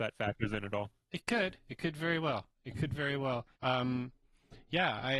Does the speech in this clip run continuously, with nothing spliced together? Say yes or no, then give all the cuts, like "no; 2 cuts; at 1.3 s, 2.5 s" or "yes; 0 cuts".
no; 1 cut; at 3.6 s